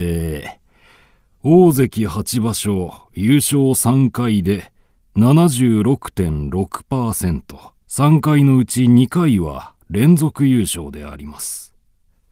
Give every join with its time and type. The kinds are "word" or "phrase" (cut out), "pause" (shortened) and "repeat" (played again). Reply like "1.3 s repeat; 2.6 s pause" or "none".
7.8 s pause